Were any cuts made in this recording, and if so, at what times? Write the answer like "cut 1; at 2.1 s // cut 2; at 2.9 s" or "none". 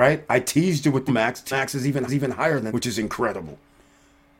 cut 1; at 1.1 s // cut 2; at 1.5 s // cut 3; at 2.1 s // cut 4; at 2.7 s